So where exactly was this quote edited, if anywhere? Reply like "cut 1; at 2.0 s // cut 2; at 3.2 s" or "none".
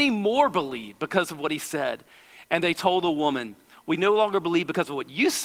none